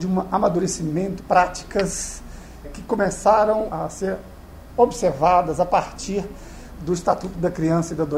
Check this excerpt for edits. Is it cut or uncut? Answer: cut